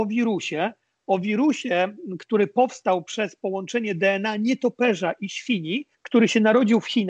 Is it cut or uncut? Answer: cut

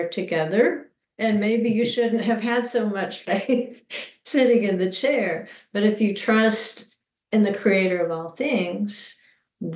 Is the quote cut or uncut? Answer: uncut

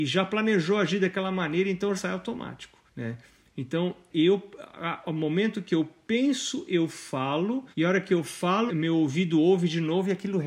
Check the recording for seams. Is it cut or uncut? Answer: cut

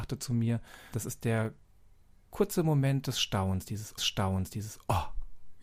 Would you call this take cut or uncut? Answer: cut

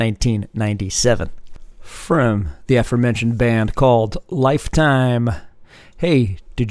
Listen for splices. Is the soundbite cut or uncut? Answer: uncut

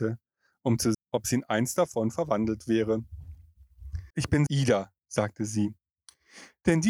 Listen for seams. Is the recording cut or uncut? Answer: cut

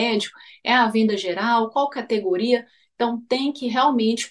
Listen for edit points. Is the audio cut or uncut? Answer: uncut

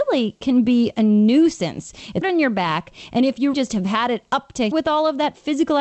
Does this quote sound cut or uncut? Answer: cut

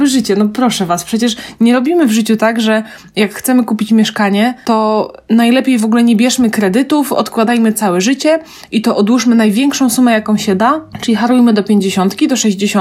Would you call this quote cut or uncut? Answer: uncut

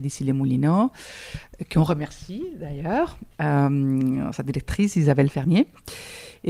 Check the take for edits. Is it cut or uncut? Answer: cut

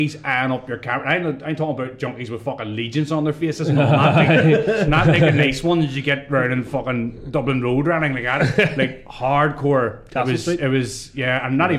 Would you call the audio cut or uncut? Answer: uncut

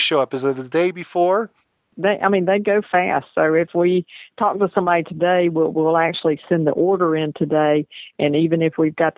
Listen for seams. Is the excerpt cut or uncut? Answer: uncut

